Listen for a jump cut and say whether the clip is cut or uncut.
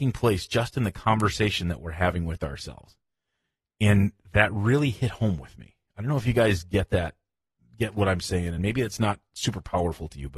uncut